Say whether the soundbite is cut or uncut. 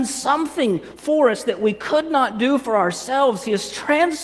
uncut